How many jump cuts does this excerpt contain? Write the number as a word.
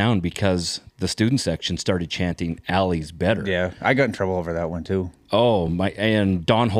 zero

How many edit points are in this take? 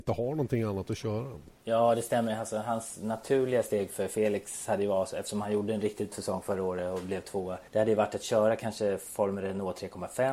three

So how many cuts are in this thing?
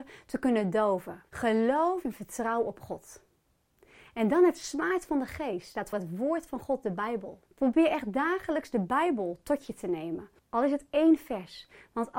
four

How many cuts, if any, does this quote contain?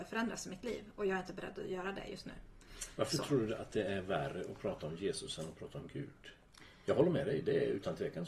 zero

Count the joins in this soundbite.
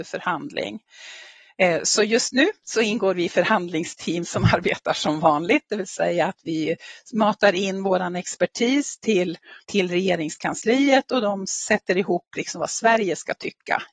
one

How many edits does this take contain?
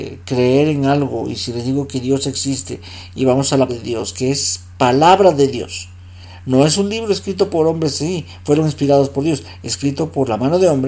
one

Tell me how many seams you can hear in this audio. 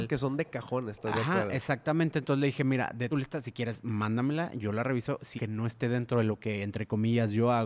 two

